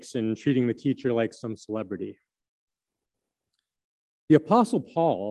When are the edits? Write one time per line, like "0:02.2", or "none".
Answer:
none